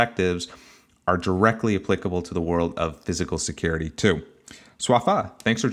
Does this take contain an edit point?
no; 0 cuts

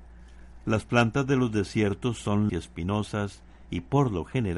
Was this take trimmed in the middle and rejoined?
yes; 1 cut; at 2.5 s

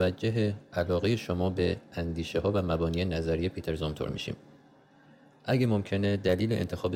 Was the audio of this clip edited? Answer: no; 0 cuts

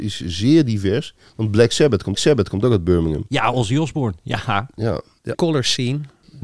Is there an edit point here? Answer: yes; 2 cuts; at 2.1 s, 5.3 s

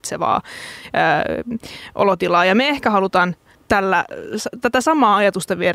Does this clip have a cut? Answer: yes; 1 cut; at 3.5 s

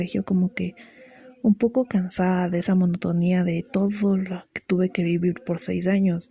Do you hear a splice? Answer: no; 0 cuts

